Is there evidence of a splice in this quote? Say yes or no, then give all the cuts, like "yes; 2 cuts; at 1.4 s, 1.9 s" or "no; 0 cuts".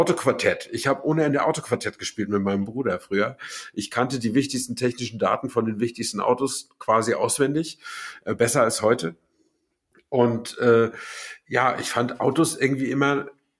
no; 0 cuts